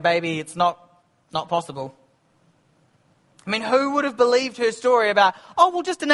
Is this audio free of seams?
yes; 0 cuts

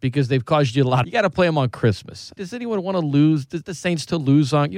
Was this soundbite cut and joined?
yes; 3 cuts; at 1.0 s, 2.4 s, 3.6 s

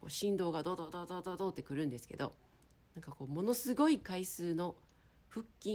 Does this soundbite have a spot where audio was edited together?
no; 0 cuts

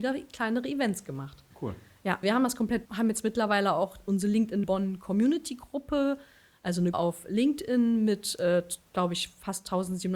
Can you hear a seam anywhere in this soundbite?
yes; 5 cuts; at 1.5 s, 2.2 s, 2.8 s, 4.6 s, 6.9 s

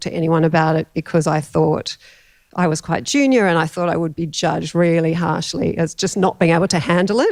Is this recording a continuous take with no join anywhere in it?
yes; 0 cuts

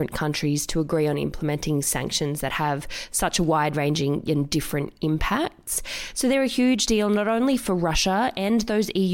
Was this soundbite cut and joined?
no; 0 cuts

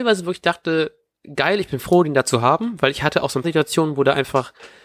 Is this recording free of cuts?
no; 1 cut; at 3.4 s

